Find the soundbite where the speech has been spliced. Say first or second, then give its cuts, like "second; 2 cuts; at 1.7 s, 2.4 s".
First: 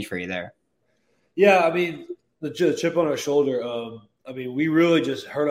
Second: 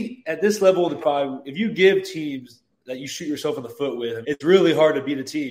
second; 3 cuts; at 1.0 s, 2.7 s, 4.2 s